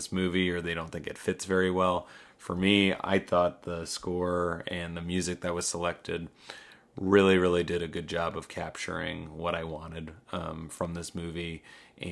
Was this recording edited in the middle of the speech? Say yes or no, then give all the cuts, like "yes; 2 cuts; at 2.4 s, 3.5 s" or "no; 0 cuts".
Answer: no; 0 cuts